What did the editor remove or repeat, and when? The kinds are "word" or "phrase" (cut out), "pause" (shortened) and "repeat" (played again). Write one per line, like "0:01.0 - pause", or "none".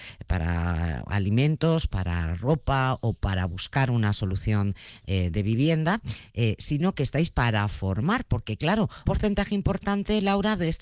0:09.1 - word